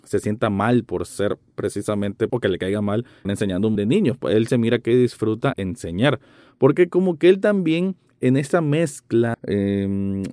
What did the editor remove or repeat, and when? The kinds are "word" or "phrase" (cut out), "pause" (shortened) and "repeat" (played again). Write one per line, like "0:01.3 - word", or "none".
0:02.3 - word
0:03.3 - word
0:03.8 - word
0:05.5 - word
0:09.3 - word